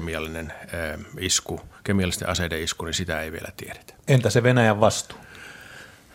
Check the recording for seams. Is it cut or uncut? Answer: uncut